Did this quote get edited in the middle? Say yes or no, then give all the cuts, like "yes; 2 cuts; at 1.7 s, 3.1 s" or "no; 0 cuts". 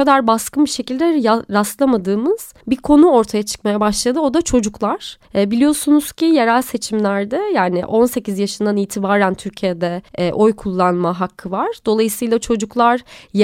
yes; 3 cuts; at 2.6 s, 5.2 s, 10.1 s